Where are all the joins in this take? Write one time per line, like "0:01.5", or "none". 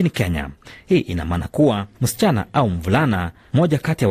0:01.9